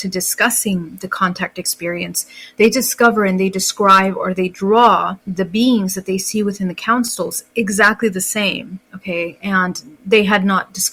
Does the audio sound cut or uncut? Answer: cut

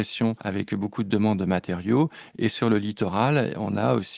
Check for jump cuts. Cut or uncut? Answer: uncut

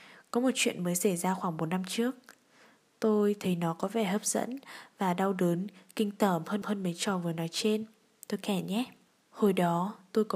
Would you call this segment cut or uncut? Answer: cut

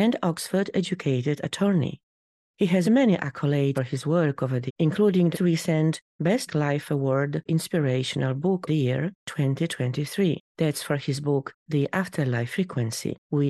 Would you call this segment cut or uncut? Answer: cut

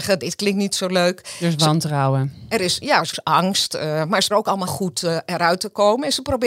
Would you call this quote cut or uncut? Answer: cut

